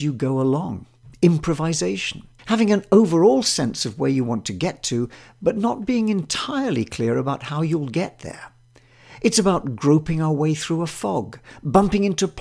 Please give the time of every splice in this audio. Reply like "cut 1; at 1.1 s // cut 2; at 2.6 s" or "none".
cut 1; at 2.4 s